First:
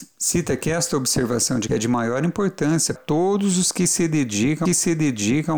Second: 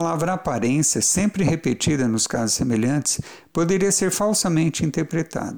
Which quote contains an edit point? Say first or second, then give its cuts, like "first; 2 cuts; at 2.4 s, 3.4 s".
first; 3 cuts; at 1.7 s, 3.0 s, 4.7 s